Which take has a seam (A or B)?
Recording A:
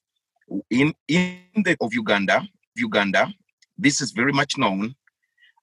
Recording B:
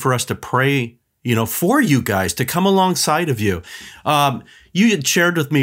A